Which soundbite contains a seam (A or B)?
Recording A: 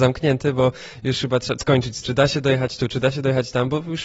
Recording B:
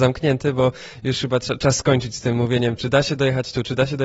A